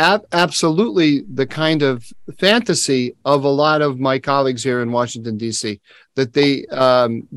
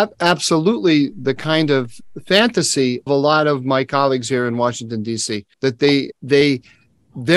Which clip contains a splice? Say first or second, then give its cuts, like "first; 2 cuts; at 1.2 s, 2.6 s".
second; 3 cuts; at 3.1 s, 5.5 s, 6.1 s